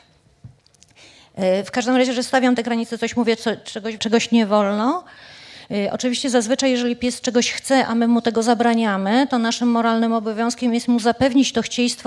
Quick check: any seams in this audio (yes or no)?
yes